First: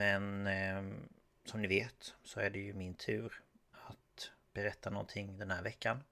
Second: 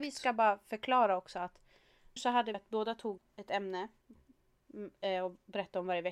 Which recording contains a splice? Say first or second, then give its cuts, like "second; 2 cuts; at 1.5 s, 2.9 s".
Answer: second; 3 cuts; at 2.2 s, 2.5 s, 3.2 s